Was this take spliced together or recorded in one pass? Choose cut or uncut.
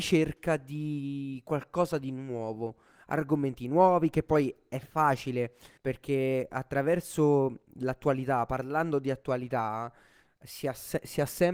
cut